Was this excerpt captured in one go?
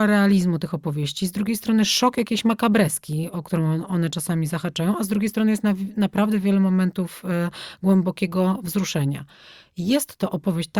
yes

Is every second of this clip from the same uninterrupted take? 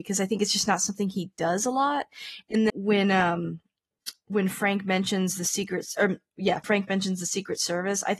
no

